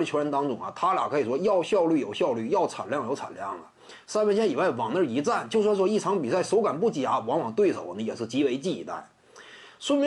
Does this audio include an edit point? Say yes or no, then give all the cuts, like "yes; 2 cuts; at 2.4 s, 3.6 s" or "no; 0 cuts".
no; 0 cuts